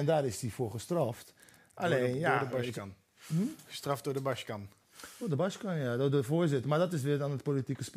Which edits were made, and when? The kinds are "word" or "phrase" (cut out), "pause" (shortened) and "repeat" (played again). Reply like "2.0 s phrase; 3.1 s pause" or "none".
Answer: none